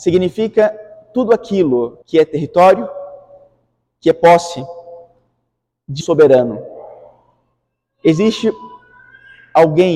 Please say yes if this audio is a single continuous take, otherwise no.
no